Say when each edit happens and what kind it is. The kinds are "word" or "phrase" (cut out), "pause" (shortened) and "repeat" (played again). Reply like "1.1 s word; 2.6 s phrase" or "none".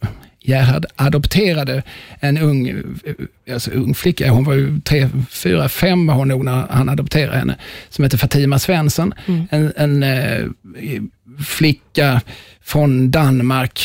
none